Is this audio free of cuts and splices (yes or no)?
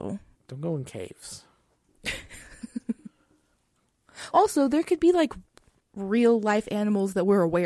no